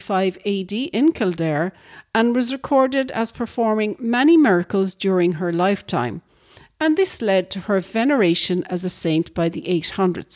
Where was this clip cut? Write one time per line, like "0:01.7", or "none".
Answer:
none